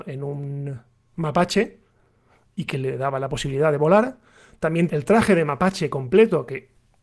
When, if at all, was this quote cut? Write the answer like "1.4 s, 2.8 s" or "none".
4.9 s